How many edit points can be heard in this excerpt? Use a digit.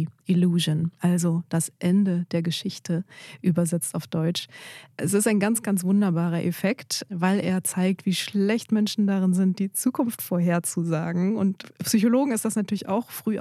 0